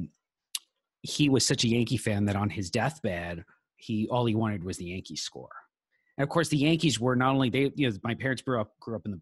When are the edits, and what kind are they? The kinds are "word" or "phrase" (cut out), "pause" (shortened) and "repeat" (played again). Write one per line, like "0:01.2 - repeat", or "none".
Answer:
none